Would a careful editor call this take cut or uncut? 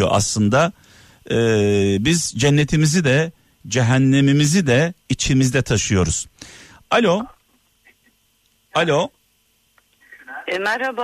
uncut